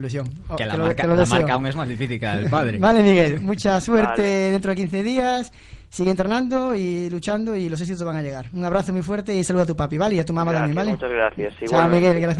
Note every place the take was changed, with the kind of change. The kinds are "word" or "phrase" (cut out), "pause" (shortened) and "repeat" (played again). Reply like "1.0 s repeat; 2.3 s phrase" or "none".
none